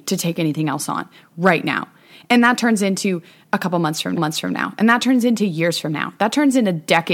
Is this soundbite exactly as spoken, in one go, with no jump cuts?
no; 1 cut; at 4.2 s

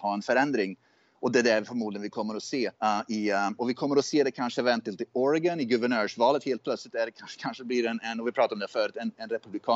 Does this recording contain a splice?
yes; 1 cut; at 2.8 s

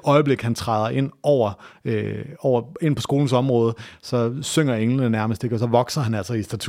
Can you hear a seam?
no; 0 cuts

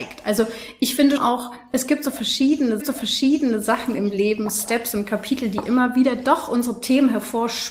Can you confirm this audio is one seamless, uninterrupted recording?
no; 2 cuts; at 1.2 s, 2.8 s

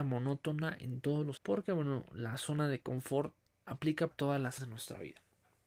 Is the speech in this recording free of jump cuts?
no; 3 cuts; at 1.4 s, 4.1 s, 4.6 s

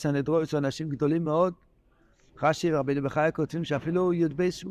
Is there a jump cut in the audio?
no; 0 cuts

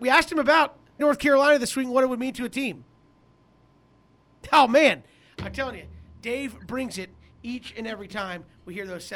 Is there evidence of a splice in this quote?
yes; 1 cut; at 1.0 s

